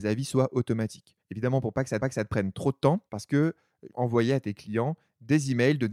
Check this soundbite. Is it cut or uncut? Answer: cut